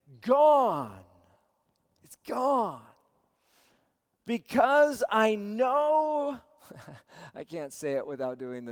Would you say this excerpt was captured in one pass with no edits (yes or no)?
yes